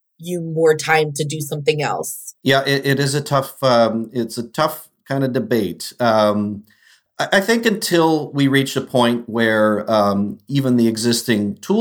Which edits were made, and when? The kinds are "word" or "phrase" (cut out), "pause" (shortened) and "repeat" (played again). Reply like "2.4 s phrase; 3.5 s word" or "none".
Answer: none